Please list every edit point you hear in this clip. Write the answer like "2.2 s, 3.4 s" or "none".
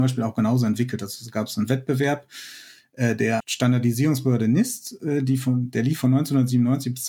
3.4 s